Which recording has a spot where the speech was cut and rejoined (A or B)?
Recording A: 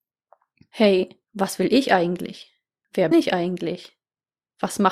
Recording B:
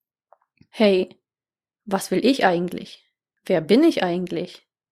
A